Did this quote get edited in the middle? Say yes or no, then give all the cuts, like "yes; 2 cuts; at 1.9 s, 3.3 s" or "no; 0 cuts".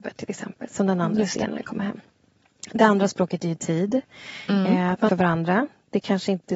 yes; 1 cut; at 5.1 s